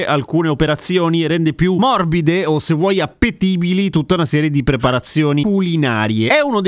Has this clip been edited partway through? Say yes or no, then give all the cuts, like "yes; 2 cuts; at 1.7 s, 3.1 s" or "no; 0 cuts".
no; 0 cuts